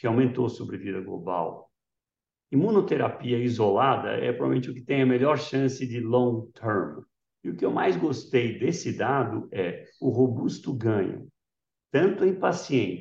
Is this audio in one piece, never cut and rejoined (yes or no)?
yes